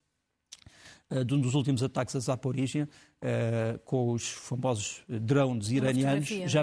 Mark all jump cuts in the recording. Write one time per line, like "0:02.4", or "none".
none